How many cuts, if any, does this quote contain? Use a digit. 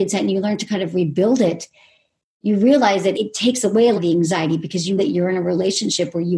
3